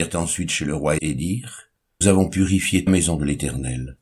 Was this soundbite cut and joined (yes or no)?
yes